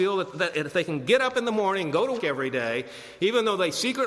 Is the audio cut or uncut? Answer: cut